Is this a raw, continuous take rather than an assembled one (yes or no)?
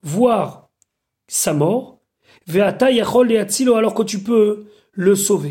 yes